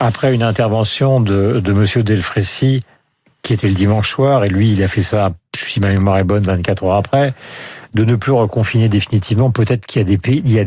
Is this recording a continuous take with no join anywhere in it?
yes; 0 cuts

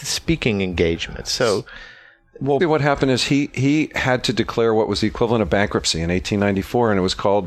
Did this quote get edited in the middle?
yes; 1 cut; at 2.6 s

